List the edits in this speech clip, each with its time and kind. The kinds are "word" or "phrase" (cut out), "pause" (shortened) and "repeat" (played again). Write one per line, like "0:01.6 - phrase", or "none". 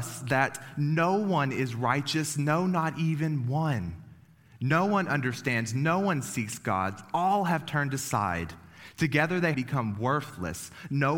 0:09.5 - word